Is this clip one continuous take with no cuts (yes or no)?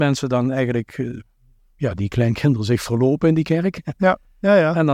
yes